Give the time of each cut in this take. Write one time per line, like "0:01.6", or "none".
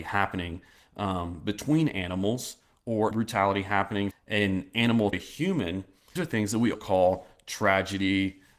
0:03.1
0:04.1
0:05.1
0:06.2
0:06.7